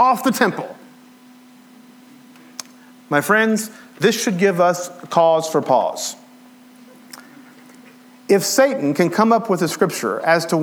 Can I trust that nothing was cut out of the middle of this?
yes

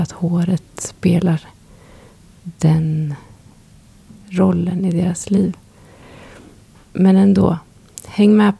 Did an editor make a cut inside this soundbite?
no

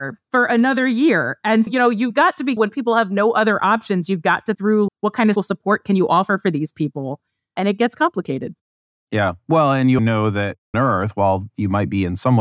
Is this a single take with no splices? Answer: no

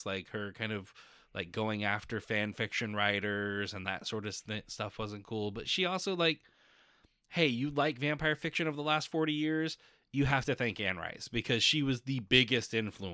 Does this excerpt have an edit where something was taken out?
no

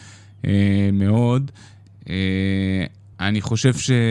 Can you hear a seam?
no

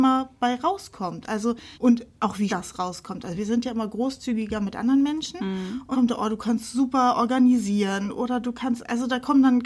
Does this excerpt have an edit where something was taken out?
yes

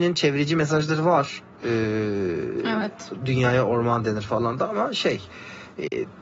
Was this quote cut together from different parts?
no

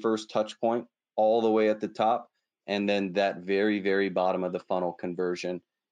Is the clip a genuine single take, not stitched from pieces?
yes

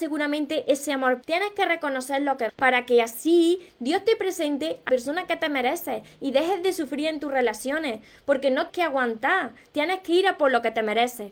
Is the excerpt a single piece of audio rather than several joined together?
no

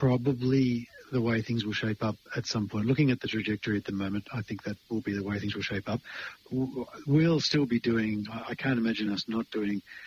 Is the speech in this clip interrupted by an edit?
no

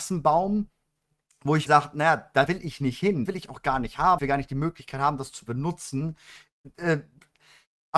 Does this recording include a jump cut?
yes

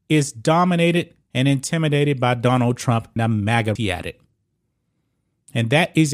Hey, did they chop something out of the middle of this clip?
yes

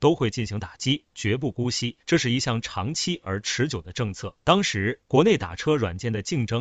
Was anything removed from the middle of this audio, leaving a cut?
yes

